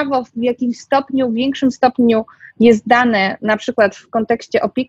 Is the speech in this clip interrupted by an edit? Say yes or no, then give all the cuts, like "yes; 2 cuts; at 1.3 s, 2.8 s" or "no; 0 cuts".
no; 0 cuts